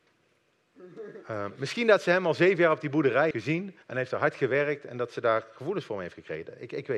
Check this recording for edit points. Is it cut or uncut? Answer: cut